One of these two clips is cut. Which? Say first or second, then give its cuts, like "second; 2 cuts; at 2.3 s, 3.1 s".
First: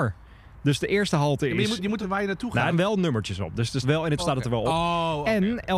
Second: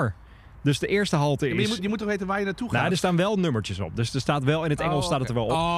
first; 4 cuts; at 2.0 s, 2.7 s, 3.8 s, 4.2 s